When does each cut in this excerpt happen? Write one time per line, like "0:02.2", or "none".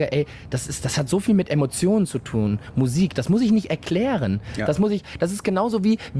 none